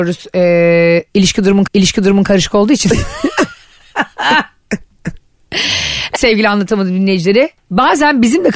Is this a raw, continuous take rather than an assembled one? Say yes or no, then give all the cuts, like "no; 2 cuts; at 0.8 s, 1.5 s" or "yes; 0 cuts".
no; 2 cuts; at 1.7 s, 6.1 s